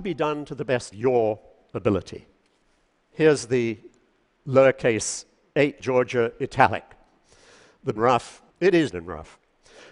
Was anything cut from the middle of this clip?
yes; 5 cuts; at 0.9 s, 5.8 s, 8.0 s, 8.5 s, 8.9 s

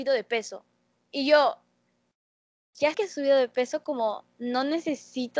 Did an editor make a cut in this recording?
yes; 1 cut; at 2.9 s

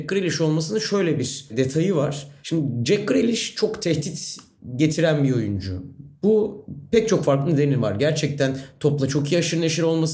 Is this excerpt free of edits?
yes; 0 cuts

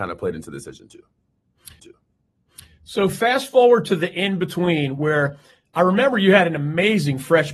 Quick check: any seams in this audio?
yes; 1 cut; at 1.8 s

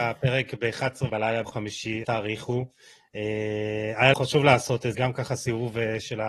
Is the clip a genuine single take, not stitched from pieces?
no; 5 cuts; at 1.1 s, 1.4 s, 2.0 s, 4.1 s, 4.9 s

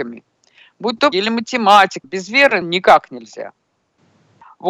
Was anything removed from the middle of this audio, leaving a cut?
yes; 3 cuts; at 1.1 s, 2.0 s, 2.6 s

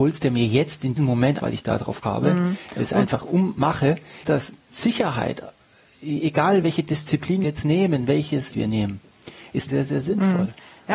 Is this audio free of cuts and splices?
no; 9 cuts; at 1.0 s, 1.4 s, 2.0 s, 4.2 s, 4.7 s, 6.6 s, 7.4 s, 8.5 s, 9.7 s

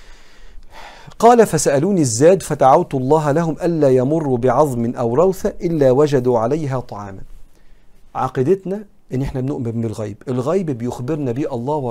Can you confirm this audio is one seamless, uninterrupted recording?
yes; 0 cuts

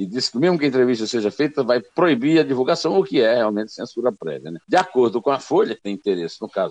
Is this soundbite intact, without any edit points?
no; 1 cut; at 4.6 s

